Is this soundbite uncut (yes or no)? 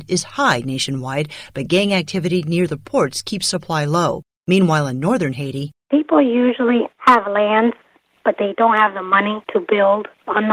yes